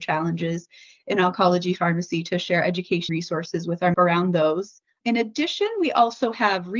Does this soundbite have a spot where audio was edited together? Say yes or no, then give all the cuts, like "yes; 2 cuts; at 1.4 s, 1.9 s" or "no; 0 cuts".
yes; 3 cuts; at 3.1 s, 3.9 s, 4.9 s